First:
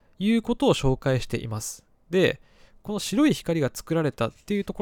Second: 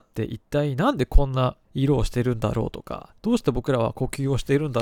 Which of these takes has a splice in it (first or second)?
second